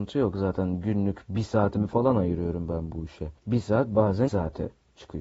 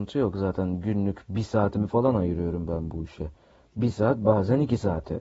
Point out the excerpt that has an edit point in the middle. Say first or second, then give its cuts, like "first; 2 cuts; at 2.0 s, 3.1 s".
first; 2 cuts; at 3.4 s, 4.3 s